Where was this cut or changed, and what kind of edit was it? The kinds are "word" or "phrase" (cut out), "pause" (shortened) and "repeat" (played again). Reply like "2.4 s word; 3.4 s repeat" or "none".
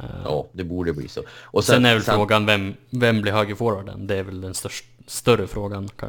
none